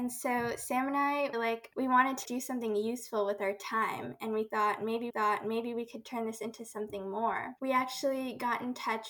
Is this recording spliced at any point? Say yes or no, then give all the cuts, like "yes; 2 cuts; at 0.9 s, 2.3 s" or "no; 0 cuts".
yes; 4 cuts; at 1.3 s, 2.2 s, 5.1 s, 7.6 s